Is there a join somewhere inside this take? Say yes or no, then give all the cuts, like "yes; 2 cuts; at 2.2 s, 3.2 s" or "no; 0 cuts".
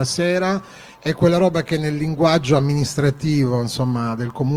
no; 0 cuts